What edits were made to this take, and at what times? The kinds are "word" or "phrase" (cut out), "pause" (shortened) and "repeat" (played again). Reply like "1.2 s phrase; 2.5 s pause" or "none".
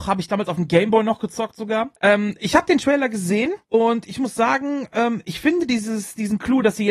2.0 s pause; 3.6 s pause